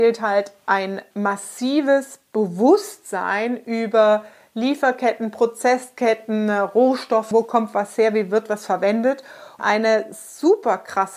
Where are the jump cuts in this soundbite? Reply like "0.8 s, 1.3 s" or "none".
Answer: 1.1 s, 7.3 s, 9.6 s